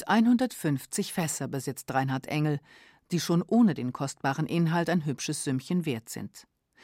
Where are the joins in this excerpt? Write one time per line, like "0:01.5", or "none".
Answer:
none